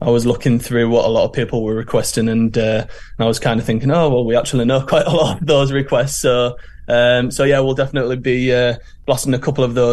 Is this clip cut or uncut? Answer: uncut